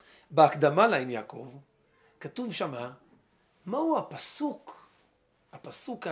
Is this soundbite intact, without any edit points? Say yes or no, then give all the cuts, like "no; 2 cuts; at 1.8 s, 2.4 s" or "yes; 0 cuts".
yes; 0 cuts